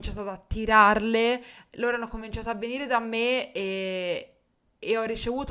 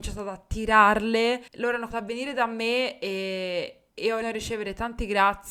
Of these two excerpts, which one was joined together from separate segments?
second; 4 cuts; at 1.5 s, 1.9 s, 3.9 s, 4.2 s

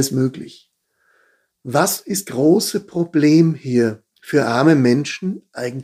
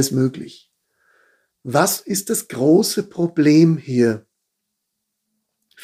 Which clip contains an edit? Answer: first; 2 cuts; at 2.2 s, 4.1 s

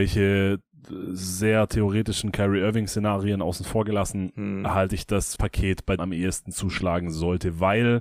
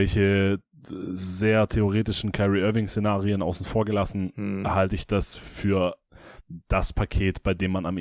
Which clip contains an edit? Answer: first; 2 cuts; at 5.4 s, 6.0 s

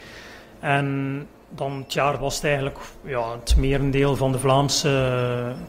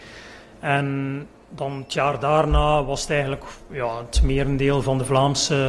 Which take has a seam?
first; 1 cut; at 2.2 s

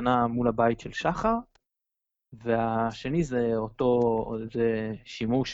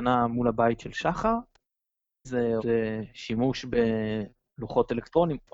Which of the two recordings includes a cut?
second; 2 cuts; at 2.2 s, 2.6 s

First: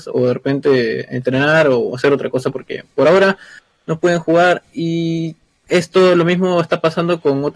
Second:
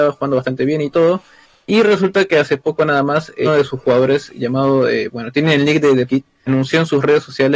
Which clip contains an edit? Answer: second; 3 cuts; at 3.4 s, 6.1 s, 6.5 s

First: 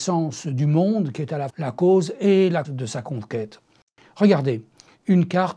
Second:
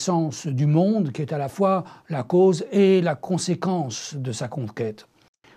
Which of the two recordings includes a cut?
first; 2 cuts; at 1.5 s, 2.6 s

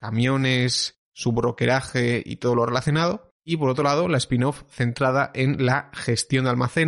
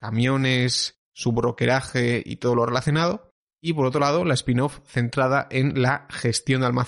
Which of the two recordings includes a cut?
first; 1 cut; at 3.4 s

